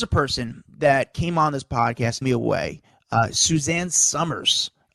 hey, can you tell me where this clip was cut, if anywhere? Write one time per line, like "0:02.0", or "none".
0:02.2